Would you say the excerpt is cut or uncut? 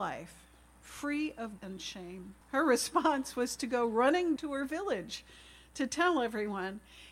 cut